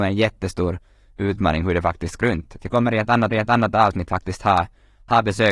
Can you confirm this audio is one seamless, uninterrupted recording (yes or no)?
no